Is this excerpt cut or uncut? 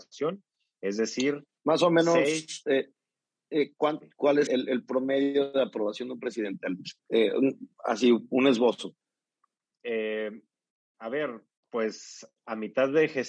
cut